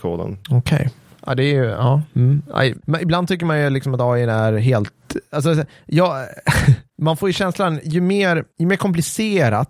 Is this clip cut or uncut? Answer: cut